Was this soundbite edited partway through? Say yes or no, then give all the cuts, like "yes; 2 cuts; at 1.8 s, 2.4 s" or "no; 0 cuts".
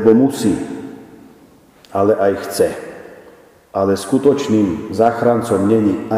no; 0 cuts